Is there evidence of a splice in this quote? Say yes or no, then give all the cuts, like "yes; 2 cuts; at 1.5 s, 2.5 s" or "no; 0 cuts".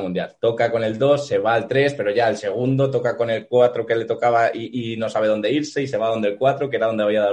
no; 0 cuts